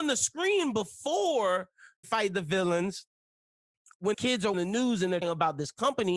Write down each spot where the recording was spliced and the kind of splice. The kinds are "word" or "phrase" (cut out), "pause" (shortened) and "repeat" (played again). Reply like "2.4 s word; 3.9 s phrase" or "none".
2.0 s word; 4.1 s word; 4.5 s word; 5.2 s word